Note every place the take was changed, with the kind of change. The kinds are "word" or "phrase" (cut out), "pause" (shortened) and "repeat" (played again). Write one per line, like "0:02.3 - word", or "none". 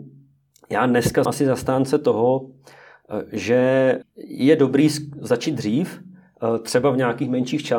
0:01.2 - word
0:04.0 - word